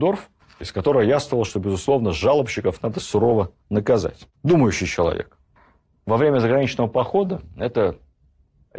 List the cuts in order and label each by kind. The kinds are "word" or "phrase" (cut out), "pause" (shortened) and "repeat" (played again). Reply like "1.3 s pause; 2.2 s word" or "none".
4.4 s pause; 5.6 s pause

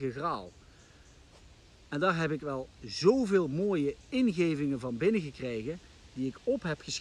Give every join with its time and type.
none

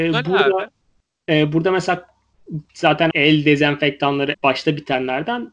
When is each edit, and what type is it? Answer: 3.1 s word; 4.3 s word

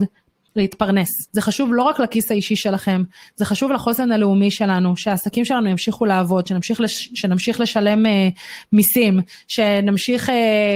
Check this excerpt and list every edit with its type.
1.3 s pause

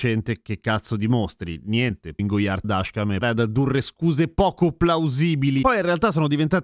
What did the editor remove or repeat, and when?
2.2 s word; 2.6 s word; 3.2 s word

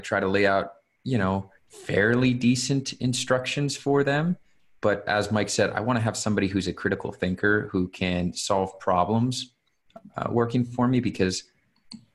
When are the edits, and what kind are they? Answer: 1.6 s pause; 5.1 s word

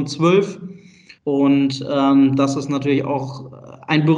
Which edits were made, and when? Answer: 1.2 s pause

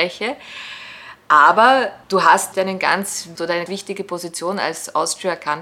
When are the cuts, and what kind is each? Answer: 2.0 s pause; 2.5 s word; 3.4 s phrase; 3.7 s word

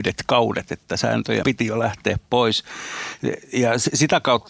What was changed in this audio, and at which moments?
1.4 s word

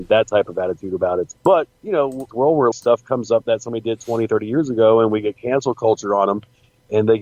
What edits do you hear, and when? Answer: 1.4 s pause; 2.3 s phrase; 2.7 s word; 3.4 s word

